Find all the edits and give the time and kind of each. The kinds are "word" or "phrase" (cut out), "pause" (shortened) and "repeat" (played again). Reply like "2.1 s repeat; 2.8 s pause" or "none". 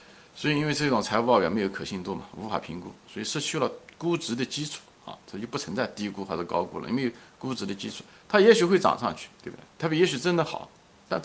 4.9 s pause; 9.7 s pause